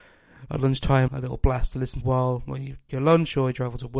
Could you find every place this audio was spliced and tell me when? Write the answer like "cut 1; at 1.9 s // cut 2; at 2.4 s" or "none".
cut 1; at 1.1 s // cut 2; at 2.0 s // cut 3; at 2.9 s